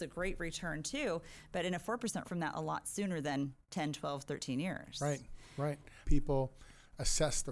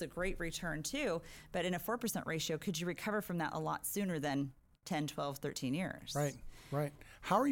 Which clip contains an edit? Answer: first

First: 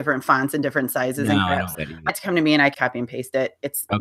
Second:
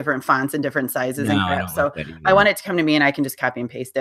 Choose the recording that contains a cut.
first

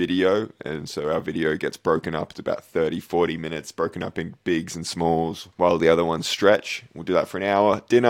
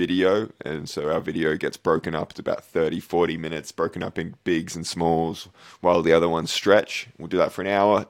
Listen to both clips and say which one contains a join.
first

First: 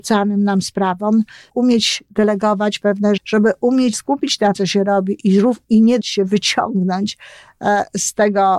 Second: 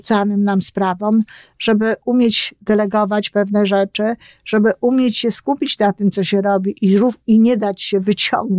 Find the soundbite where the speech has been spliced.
first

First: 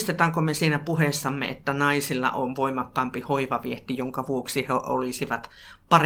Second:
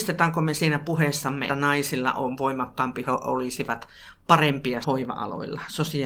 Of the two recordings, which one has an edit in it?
second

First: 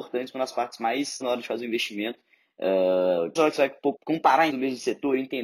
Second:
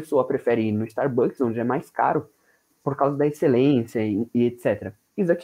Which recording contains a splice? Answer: first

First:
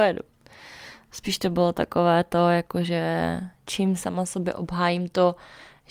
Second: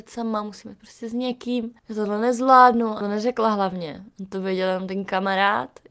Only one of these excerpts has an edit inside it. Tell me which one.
second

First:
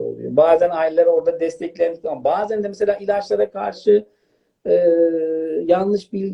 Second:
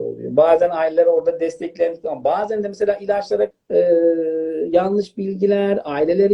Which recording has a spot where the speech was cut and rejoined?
second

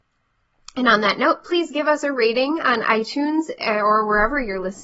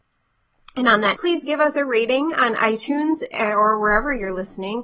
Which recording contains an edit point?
second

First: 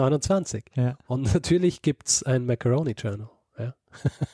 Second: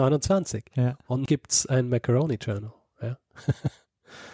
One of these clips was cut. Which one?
second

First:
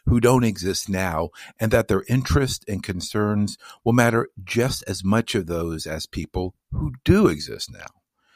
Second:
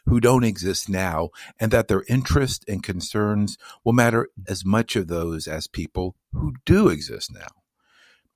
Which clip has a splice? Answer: second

